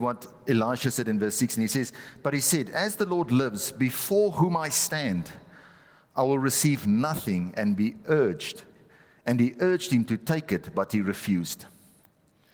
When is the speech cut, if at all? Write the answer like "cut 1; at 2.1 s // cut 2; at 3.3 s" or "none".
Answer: none